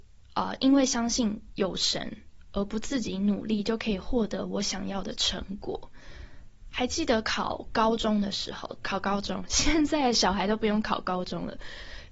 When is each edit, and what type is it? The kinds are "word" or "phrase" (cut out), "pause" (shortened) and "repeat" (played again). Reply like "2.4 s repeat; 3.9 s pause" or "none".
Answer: 8.8 s word